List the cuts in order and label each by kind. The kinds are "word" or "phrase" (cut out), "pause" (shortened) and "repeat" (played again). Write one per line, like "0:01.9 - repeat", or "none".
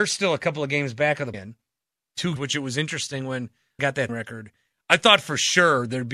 0:01.3 - word
0:02.4 - word
0:03.8 - word
0:04.1 - word